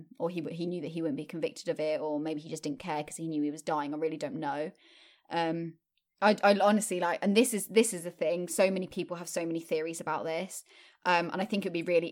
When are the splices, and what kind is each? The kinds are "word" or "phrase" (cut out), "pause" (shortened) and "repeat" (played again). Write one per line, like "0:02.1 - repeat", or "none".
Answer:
none